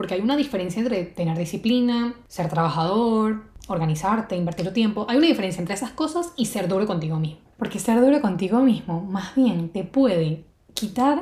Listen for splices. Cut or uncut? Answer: uncut